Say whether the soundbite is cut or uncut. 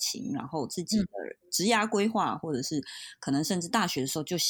uncut